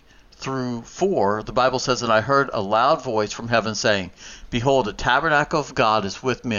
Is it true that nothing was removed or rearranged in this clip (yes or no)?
yes